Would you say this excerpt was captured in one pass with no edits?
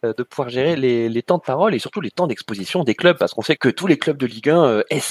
no; 1 cut; at 3.6 s

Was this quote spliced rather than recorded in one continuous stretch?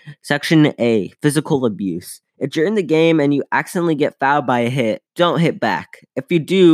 yes; 2 cuts; at 2.3 s, 5.1 s

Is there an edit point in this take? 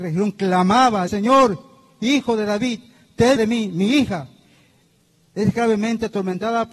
yes; 2 cuts; at 1.1 s, 3.4 s

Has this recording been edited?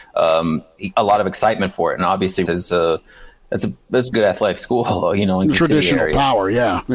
yes; 3 cuts; at 2.5 s, 4.1 s, 5.5 s

